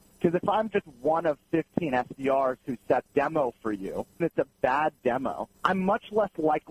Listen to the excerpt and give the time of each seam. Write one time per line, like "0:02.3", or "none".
0:03.1
0:04.2
0:05.5

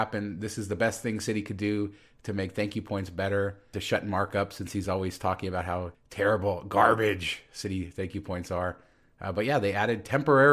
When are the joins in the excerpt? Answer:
none

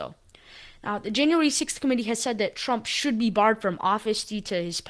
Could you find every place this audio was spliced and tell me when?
none

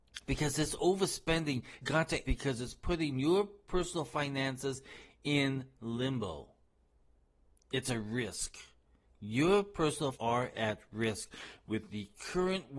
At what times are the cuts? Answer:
0:01.8
0:02.3
0:10.1

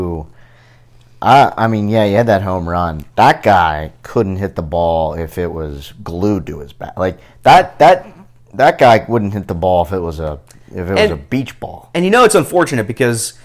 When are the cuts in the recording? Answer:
none

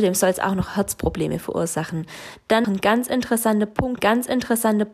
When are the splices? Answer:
0:02.6
0:04.0

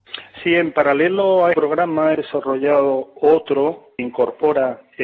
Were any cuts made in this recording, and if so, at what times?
0:01.5
0:02.1
0:04.0

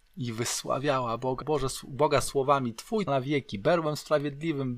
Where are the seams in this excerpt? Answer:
0:01.4
0:03.1

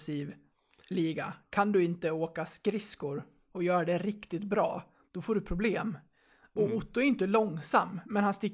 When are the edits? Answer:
none

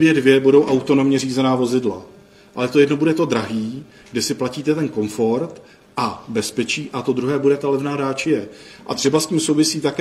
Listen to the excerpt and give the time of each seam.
none

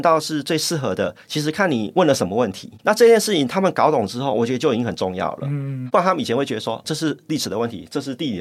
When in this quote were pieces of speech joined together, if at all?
0:06.8

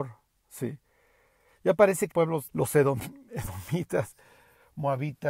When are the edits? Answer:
0:02.1
0:02.5

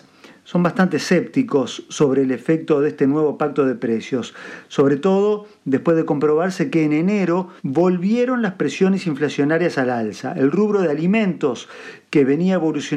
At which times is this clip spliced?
0:07.6

